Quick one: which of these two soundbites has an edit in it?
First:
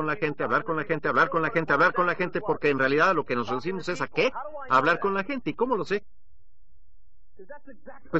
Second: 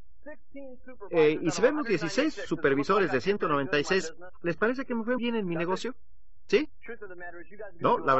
second; 1 cut; at 5.2 s

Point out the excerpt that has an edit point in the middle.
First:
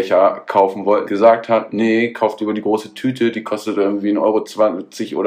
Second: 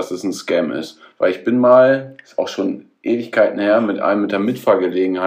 first; 1 cut; at 1.1 s

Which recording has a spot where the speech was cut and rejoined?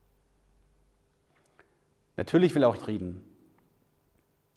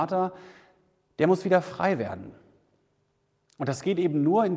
first; 1 cut; at 2.8 s

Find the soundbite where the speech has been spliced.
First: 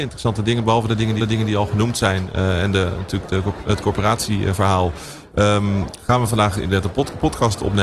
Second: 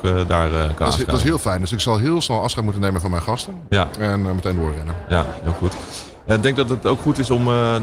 first; 1 cut; at 1.2 s

